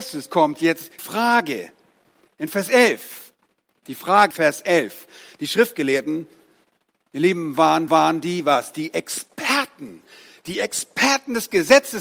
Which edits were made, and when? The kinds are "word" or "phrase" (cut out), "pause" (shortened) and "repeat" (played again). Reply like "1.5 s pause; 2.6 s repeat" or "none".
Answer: 1.0 s word; 4.3 s word; 7.9 s repeat